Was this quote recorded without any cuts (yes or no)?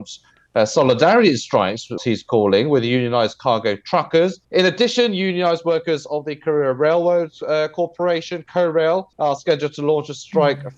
no